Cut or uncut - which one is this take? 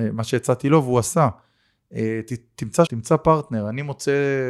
cut